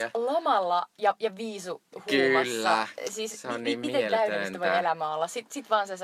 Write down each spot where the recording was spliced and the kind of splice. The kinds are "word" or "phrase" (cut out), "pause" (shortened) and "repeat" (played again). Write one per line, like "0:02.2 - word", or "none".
none